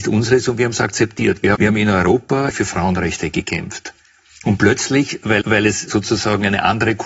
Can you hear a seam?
yes; 3 cuts; at 1.5 s, 2.5 s, 5.4 s

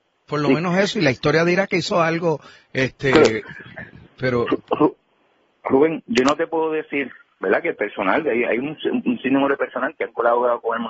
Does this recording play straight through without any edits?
yes; 0 cuts

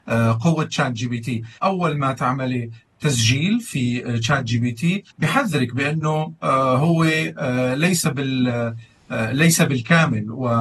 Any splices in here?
yes; 2 cuts; at 1.6 s, 5.1 s

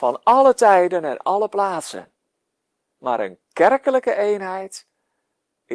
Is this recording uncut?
yes; 0 cuts

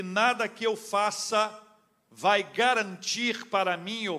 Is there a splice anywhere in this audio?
no; 0 cuts

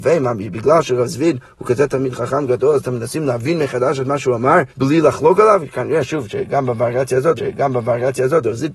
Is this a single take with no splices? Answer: no; 2 cuts; at 4.7 s, 7.4 s

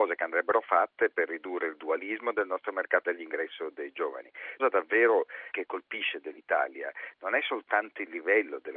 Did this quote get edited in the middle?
yes; 3 cuts; at 3.1 s, 4.6 s, 5.5 s

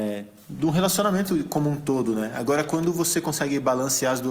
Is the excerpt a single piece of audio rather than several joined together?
yes; 0 cuts

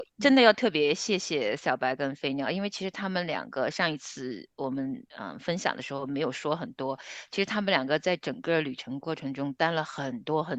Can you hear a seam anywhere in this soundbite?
no; 0 cuts

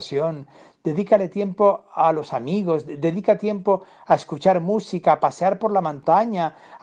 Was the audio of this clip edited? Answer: no; 0 cuts

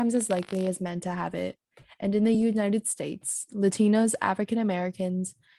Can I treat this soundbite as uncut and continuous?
yes; 0 cuts

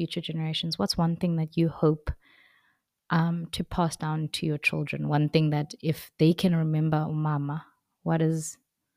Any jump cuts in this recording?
no; 0 cuts

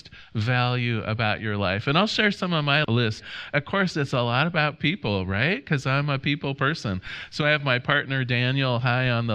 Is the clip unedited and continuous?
yes; 0 cuts

